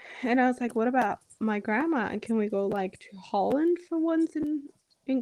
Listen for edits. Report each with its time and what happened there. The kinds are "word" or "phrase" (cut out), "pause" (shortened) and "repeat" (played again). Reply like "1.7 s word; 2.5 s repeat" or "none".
none